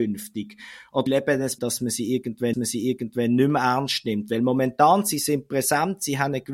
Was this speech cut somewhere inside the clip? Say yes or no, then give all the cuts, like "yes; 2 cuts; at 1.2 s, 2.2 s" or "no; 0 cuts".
yes; 3 cuts; at 1.1 s, 1.6 s, 2.5 s